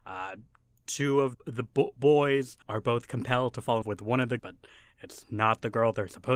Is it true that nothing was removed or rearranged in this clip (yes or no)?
no